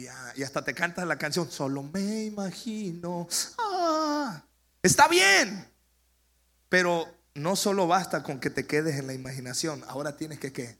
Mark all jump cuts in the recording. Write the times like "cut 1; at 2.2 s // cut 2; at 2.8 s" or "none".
none

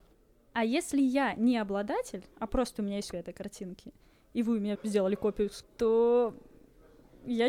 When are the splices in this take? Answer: cut 1; at 2.3 s // cut 2; at 3.1 s // cut 3; at 4.7 s // cut 4; at 5.6 s

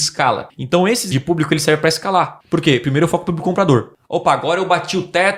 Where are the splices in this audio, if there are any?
cut 1; at 1.1 s

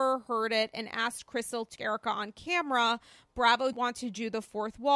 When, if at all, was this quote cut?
cut 1; at 1.8 s // cut 2; at 3.7 s

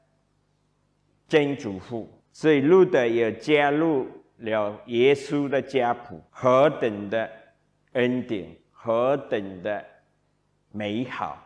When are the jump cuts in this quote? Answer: cut 1; at 2.2 s // cut 2; at 6.3 s

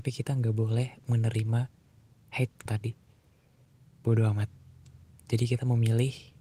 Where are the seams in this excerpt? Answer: cut 1; at 1.0 s // cut 2; at 2.7 s

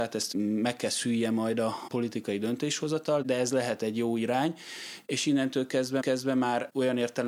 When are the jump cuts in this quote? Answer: cut 1; at 6.0 s

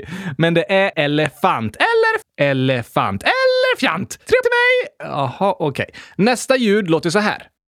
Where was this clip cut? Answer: cut 1; at 0.9 s // cut 2; at 2.2 s // cut 3; at 4.4 s

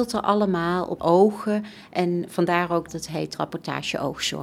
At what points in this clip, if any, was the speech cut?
cut 1; at 1.0 s // cut 2; at 2.9 s // cut 3; at 3.3 s

